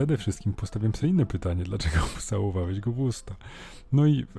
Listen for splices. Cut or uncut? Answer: uncut